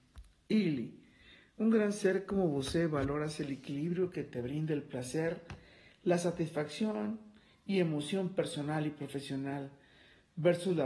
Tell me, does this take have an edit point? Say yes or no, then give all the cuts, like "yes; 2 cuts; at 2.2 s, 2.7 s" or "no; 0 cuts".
no; 0 cuts